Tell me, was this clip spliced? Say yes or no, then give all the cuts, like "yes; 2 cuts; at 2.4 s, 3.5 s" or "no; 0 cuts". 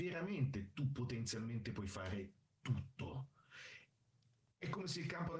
no; 0 cuts